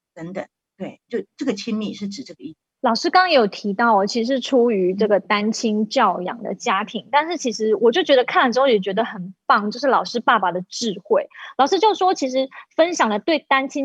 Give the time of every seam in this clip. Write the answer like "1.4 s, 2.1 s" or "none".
1.1 s, 2.8 s